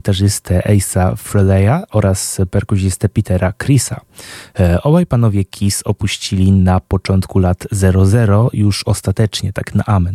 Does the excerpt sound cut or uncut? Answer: uncut